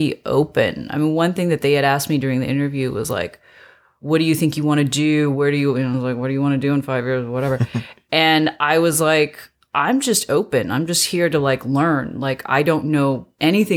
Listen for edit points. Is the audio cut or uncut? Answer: uncut